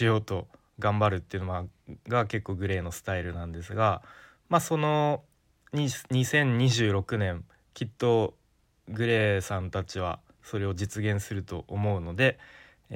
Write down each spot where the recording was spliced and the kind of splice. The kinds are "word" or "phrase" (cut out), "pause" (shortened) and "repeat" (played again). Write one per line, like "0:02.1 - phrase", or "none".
none